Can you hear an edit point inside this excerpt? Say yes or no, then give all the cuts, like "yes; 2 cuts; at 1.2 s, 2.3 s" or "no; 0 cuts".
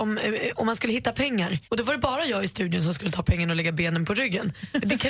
yes; 1 cut; at 1.6 s